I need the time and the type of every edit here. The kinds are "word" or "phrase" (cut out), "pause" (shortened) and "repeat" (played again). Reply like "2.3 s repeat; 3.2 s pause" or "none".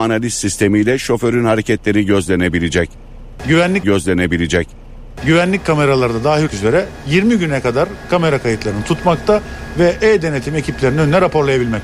3.8 s repeat; 6.5 s word